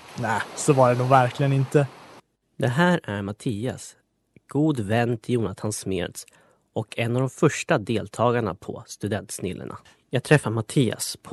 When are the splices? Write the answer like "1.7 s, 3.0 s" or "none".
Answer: none